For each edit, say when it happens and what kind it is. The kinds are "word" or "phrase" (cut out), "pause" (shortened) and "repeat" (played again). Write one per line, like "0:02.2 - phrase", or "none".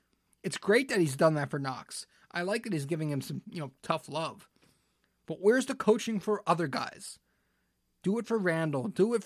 none